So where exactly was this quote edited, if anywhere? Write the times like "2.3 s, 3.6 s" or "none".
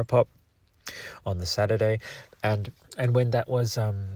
2.8 s